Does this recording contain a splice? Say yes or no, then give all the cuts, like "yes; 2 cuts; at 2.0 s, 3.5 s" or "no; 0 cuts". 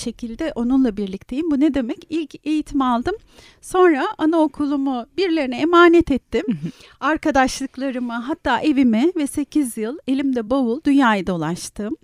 no; 0 cuts